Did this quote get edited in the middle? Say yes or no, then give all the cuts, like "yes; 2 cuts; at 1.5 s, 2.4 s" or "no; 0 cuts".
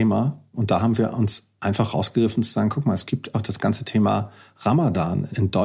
yes; 1 cut; at 3.3 s